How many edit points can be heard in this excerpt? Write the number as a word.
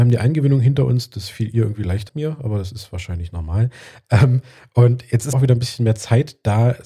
two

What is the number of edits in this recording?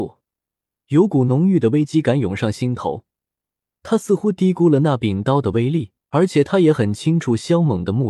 one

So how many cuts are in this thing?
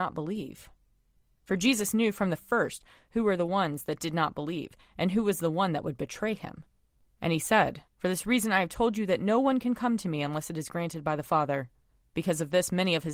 two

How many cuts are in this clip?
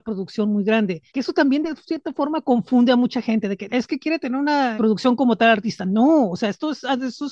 three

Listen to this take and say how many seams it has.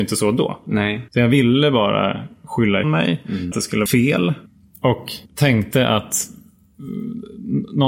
five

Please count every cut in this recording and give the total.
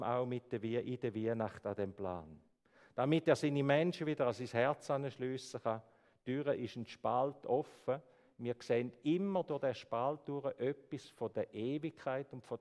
zero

